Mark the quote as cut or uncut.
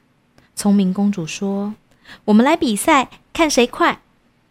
cut